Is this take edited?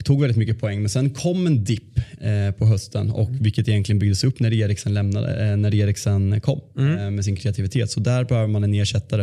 no; 0 cuts

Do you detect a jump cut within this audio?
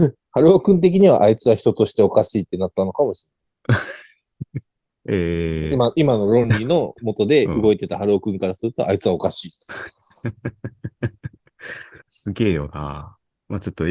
no; 0 cuts

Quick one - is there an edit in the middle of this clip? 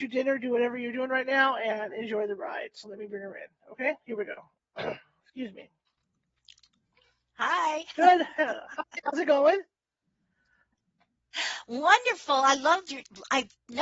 no; 0 cuts

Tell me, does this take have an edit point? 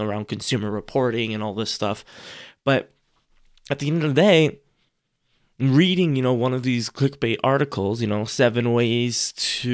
no; 0 cuts

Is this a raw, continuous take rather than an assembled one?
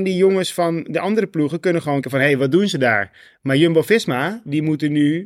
no; 1 cut; at 2.0 s

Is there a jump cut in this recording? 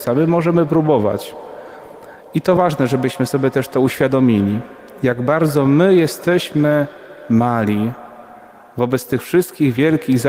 no; 0 cuts

